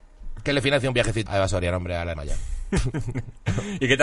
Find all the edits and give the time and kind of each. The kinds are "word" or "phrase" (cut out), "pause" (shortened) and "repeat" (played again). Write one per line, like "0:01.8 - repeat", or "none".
0:01.3 - word
0:02.1 - word